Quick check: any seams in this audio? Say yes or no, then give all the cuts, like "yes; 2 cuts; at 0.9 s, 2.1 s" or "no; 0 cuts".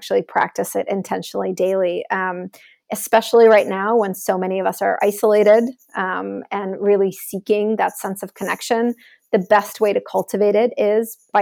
no; 0 cuts